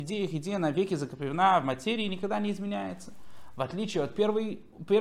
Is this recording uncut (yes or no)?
yes